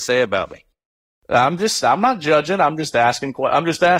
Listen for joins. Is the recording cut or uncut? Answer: uncut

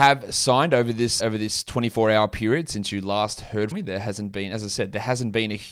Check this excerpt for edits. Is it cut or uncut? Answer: cut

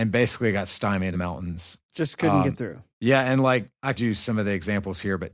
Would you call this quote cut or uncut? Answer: cut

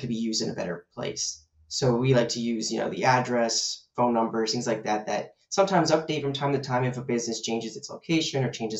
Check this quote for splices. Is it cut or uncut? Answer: uncut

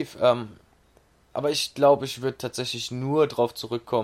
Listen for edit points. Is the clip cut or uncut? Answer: uncut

